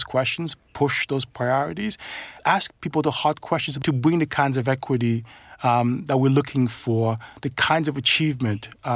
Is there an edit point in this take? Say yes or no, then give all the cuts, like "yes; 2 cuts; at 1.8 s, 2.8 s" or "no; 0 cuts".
yes; 1 cut; at 2.4 s